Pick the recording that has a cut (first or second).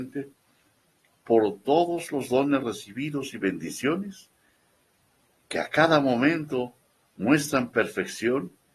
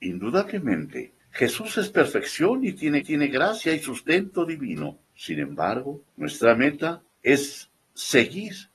second